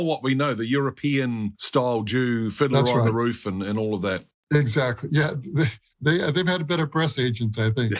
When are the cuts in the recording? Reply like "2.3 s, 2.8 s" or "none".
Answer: 1.5 s